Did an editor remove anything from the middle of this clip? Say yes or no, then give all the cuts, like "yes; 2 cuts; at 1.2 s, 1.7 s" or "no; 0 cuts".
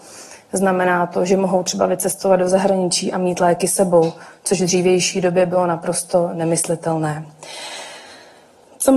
no; 0 cuts